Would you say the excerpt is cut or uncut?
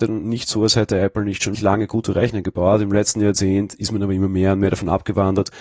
cut